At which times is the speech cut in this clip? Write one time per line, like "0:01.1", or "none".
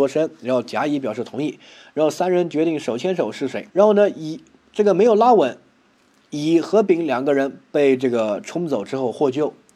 0:03.7